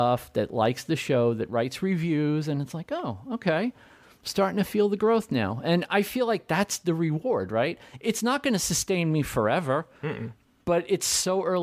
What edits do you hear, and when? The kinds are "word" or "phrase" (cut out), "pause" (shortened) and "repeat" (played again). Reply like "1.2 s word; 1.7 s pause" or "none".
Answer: none